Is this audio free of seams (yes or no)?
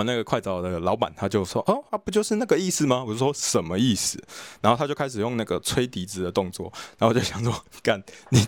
no